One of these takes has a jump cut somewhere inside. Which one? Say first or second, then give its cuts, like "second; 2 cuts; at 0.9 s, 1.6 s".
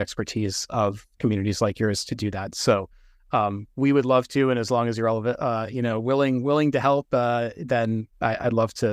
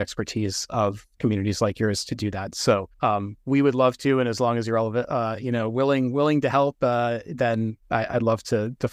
second; 1 cut; at 2.9 s